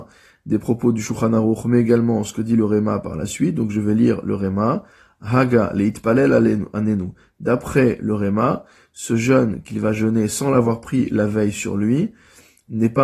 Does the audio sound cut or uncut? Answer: uncut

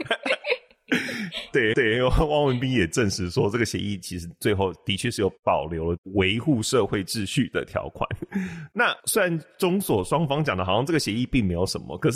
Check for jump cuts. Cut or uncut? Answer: cut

